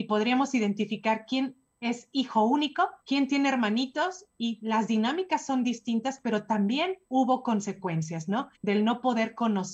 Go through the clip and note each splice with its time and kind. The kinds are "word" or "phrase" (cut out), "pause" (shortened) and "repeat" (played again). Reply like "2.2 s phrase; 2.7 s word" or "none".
3.0 s pause; 7.0 s pause; 8.6 s pause